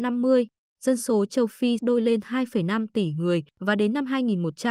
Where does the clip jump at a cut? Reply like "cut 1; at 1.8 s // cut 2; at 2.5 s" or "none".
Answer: cut 1; at 1.8 s // cut 2; at 3.5 s